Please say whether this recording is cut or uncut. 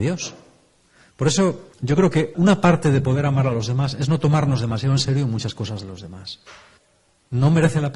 cut